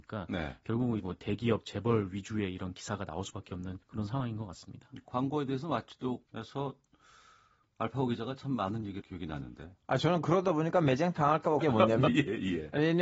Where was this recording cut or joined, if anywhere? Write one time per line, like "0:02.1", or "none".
0:01.0
0:03.8
0:06.3
0:09.0
0:11.6
0:12.1